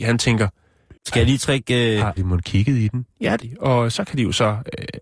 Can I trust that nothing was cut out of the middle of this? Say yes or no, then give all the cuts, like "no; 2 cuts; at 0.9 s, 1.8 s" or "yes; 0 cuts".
no; 3 cuts; at 1.0 s, 2.2 s, 3.4 s